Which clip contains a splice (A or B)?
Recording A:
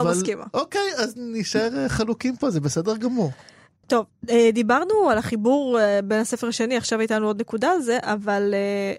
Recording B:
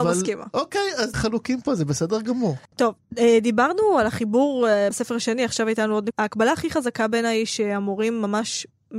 B